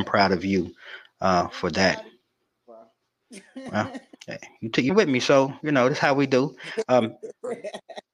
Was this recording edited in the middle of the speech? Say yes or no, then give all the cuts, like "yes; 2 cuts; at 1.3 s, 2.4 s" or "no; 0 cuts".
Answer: yes; 1 cut; at 4.9 s